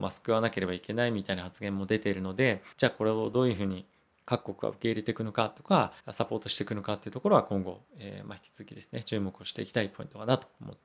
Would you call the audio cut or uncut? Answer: cut